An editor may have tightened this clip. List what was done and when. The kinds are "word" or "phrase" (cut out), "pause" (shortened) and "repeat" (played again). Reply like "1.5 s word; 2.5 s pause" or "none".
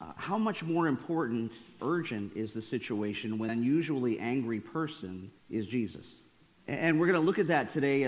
1.8 s word; 3.5 s word; 5.4 s pause; 6.4 s pause